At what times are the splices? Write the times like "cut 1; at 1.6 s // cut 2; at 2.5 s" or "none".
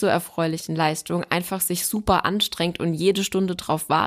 none